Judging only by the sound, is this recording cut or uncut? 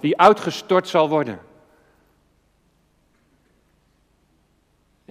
uncut